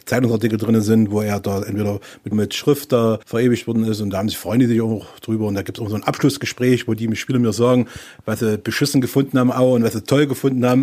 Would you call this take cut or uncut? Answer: cut